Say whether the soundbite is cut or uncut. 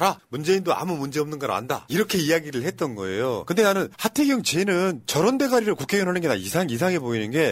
uncut